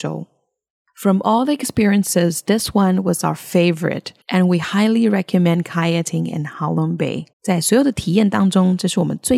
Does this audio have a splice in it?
yes; 2 cuts; at 4.2 s, 7.3 s

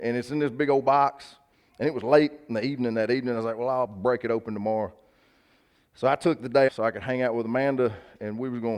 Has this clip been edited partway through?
yes; 1 cut; at 6.7 s

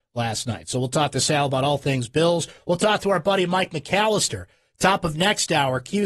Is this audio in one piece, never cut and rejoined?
yes; 0 cuts

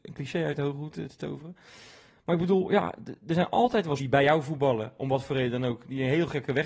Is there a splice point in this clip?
yes; 1 cut; at 4.0 s

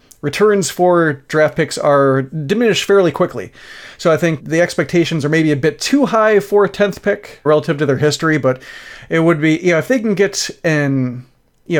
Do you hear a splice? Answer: yes; 2 cuts; at 4.4 s, 7.5 s

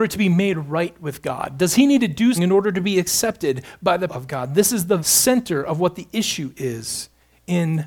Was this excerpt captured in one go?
no; 3 cuts; at 2.4 s, 4.1 s, 5.0 s

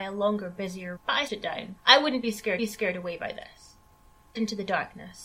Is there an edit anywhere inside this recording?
yes; 5 cuts; at 1.0 s, 1.3 s, 1.8 s, 2.6 s, 4.3 s

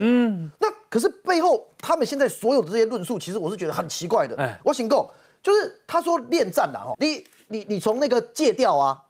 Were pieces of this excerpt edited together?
yes; 1 cut; at 6.9 s

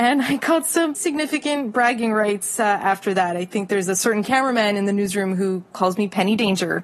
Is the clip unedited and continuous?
no; 1 cut; at 0.9 s

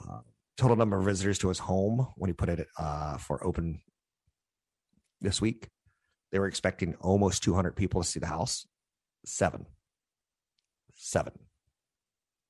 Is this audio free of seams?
yes; 0 cuts

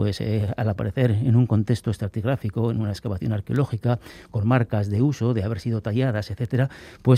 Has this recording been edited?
no; 0 cuts

